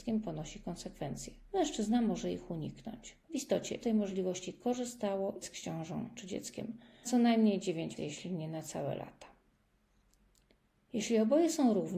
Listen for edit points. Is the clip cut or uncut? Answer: cut